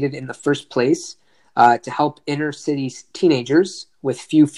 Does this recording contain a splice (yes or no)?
no